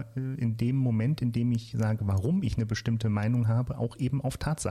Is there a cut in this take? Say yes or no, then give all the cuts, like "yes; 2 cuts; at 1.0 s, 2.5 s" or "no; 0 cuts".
no; 0 cuts